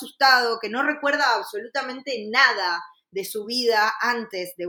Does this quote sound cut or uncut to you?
uncut